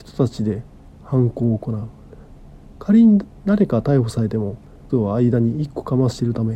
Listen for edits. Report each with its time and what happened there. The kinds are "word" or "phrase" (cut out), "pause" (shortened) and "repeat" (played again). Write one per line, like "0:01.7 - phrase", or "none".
0:04.9 - word